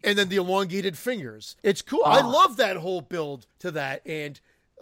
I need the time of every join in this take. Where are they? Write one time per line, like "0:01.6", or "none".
0:01.6
0:03.5

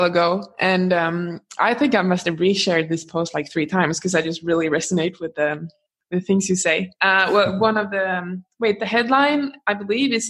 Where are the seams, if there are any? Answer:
none

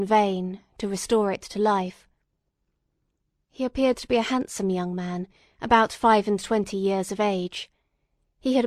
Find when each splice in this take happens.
none

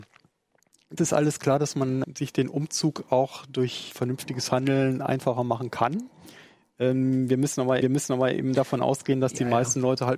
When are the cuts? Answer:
0:01.0
0:02.0
0:03.9
0:07.8

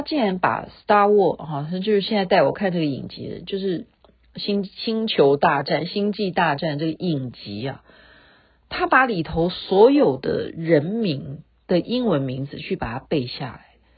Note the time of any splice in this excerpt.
none

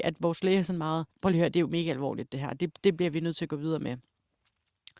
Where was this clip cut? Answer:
0:01.1

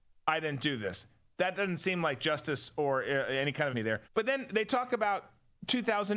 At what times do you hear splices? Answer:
0:03.7
0:04.0

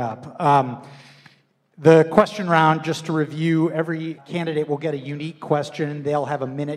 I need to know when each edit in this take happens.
0:04.2

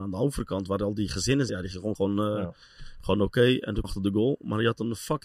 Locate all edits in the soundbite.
0:01.5
0:01.9
0:03.8

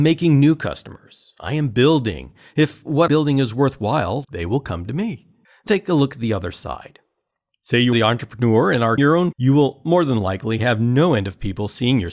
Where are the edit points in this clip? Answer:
0:03.1
0:04.2
0:05.7
0:07.9
0:09.0
0:09.3

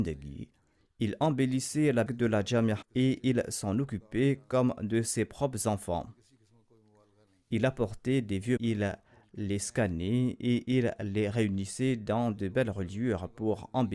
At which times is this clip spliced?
0:02.1
0:02.8
0:08.6

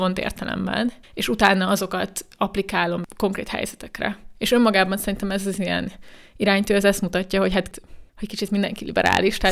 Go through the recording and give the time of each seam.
0:01.0

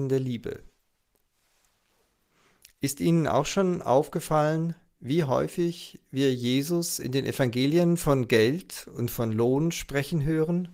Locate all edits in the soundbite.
none

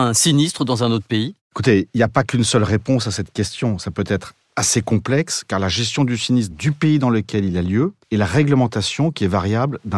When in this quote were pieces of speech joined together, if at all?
0:01.4
0:06.5
0:08.0

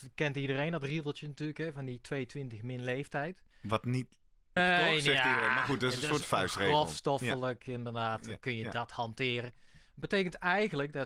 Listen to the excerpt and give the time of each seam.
0:03.5
0:04.6

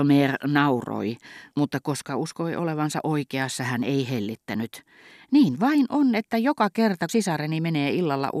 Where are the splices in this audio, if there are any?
0:01.5
0:07.1

